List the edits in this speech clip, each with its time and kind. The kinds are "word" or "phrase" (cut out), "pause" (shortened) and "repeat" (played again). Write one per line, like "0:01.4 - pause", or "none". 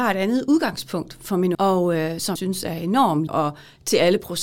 0:01.5 - word
0:02.4 - word
0:03.3 - word